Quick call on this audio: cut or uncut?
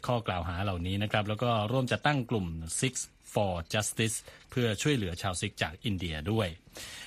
uncut